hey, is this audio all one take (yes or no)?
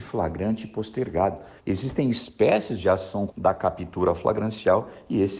no